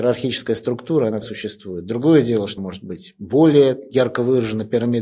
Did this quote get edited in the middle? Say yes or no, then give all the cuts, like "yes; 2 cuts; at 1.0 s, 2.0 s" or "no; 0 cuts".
yes; 2 cuts; at 1.2 s, 2.6 s